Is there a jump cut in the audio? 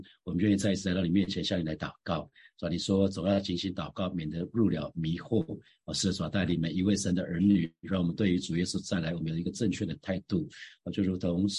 no; 0 cuts

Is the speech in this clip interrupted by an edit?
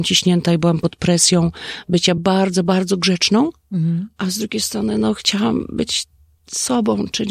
no; 0 cuts

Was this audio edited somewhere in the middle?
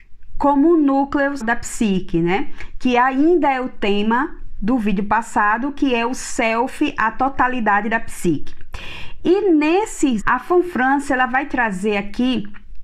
yes; 2 cuts; at 1.4 s, 10.2 s

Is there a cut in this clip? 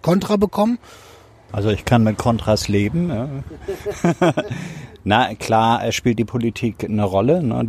no; 0 cuts

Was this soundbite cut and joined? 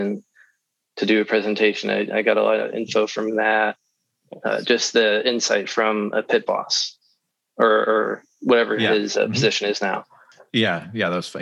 no; 0 cuts

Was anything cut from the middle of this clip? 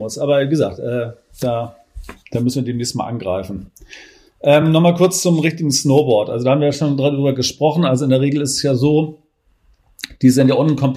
no; 0 cuts

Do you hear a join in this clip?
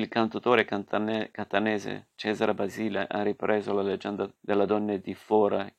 yes; 1 cut; at 4.4 s

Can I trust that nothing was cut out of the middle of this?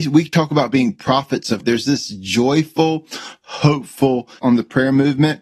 no; 2 cuts; at 1.6 s, 4.4 s

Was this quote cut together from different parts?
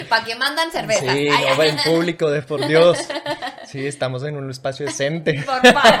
no; 0 cuts

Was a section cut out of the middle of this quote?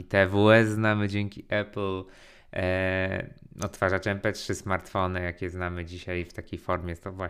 no; 0 cuts

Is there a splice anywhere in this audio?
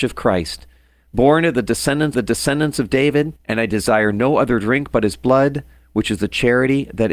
yes; 2 cuts; at 2.1 s, 3.4 s

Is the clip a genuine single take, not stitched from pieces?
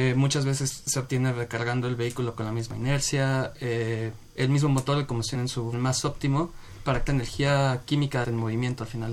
no; 5 cuts; at 4.3 s, 5.3 s, 5.7 s, 7.1 s, 8.2 s

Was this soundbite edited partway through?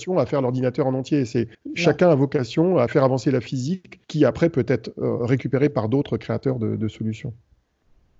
yes; 2 cuts; at 1.5 s, 4.0 s

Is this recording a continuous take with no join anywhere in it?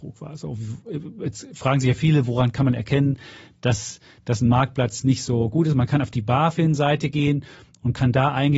yes; 0 cuts

